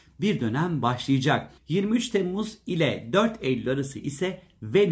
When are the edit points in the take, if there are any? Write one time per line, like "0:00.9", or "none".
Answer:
0:01.6